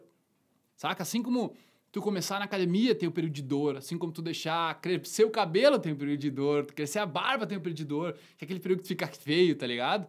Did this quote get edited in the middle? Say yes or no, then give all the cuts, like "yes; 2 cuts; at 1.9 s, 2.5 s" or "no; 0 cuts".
no; 0 cuts